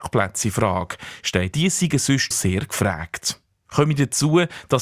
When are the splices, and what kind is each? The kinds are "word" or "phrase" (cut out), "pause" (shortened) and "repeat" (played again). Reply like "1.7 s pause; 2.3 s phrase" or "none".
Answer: 1.5 s phrase; 2.3 s word